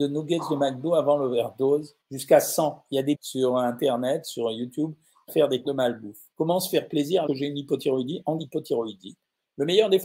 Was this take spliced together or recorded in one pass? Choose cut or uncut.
cut